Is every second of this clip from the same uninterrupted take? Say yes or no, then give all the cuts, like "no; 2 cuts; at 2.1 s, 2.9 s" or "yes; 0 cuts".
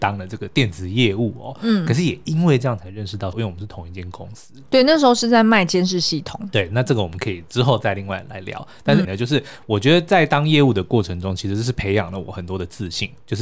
no; 2 cuts; at 3.3 s, 9.0 s